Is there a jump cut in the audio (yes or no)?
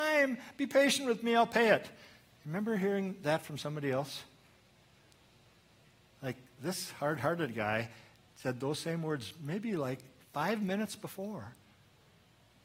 no